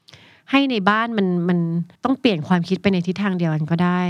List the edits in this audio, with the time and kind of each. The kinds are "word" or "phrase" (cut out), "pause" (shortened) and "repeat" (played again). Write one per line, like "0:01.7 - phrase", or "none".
0:02.0 - pause

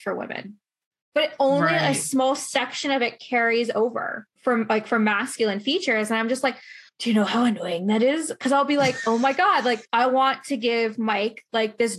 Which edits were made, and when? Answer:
0:04.4 - pause
0:06.9 - pause
0:09.8 - pause

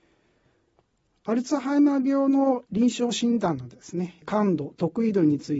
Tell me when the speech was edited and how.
none

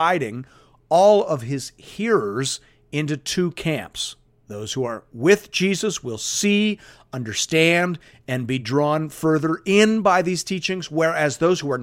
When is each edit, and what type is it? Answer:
none

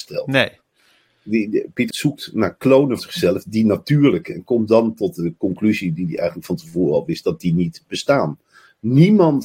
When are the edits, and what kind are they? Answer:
0:01.9 - word
0:03.0 - word

